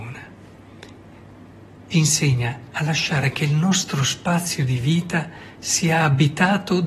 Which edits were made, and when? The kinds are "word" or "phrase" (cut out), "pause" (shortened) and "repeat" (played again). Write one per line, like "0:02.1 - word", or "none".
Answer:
0:01.9 - word

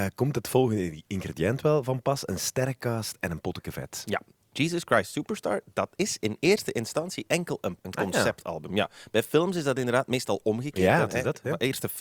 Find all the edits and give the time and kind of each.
0:07.8 - word

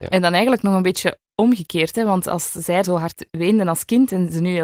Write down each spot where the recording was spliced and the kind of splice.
0:02.8 - word

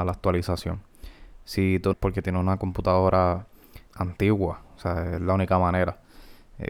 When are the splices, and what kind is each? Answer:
0:01.9 - phrase
0:03.9 - word

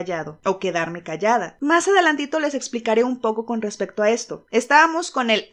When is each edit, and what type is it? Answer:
none

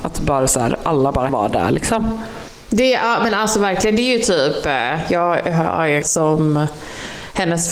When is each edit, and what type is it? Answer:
0:01.3 - phrase
0:06.0 - word

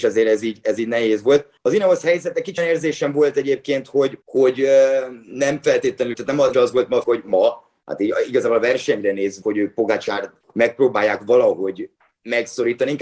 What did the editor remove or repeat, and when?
0:01.6 - pause
0:02.6 - word
0:04.2 - pause
0:06.1 - word
0:06.5 - phrase
0:07.0 - phrase
0:09.4 - word
0:10.4 - pause

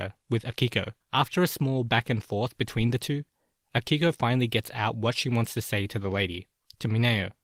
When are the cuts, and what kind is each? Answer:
0:01.0 - pause

